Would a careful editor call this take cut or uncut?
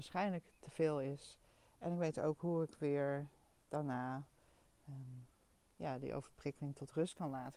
uncut